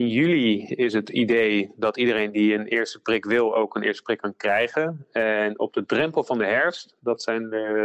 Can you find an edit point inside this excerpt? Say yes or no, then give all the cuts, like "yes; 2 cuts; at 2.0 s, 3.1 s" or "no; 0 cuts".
no; 0 cuts